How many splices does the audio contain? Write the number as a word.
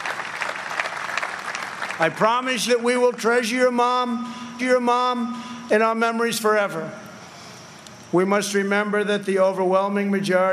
two